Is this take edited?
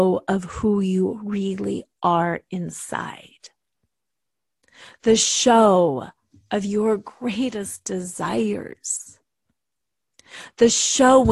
no; 0 cuts

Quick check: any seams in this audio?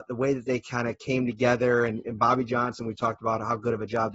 no; 0 cuts

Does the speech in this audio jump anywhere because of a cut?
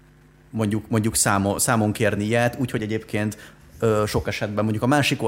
no; 0 cuts

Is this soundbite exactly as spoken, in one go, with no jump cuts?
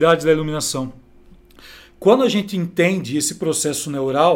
yes; 0 cuts

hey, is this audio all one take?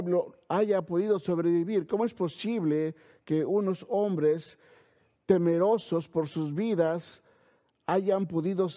yes; 0 cuts

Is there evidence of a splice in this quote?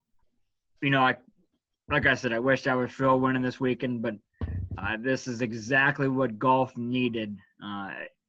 no; 0 cuts

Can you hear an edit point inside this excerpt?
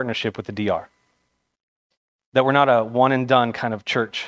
no; 0 cuts

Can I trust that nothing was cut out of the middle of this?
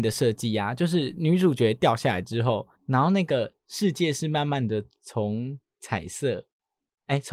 no; 1 cut; at 2.7 s

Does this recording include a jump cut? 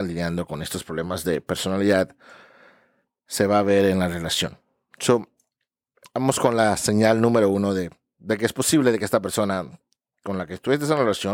no; 0 cuts

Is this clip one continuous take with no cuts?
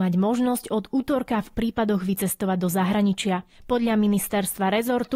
no; 1 cut; at 1.5 s

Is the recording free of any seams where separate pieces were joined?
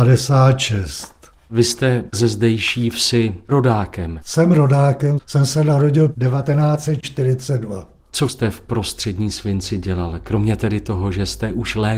no; 2 cuts; at 5.2 s, 8.3 s

